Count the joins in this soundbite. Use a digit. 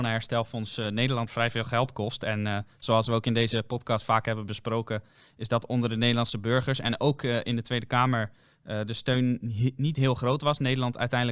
0